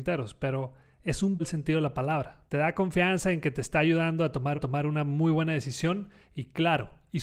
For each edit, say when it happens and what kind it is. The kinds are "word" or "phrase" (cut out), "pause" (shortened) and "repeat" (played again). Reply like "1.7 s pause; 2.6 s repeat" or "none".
1.4 s phrase; 2.5 s pause; 4.5 s repeat